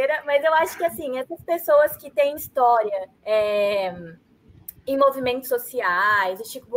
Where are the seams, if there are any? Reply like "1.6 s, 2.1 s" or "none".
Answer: 2.4 s, 3.2 s